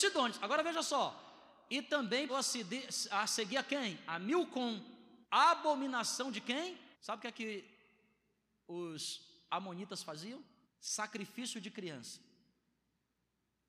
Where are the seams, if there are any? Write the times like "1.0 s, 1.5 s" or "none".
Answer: 2.3 s, 5.2 s, 6.9 s, 10.6 s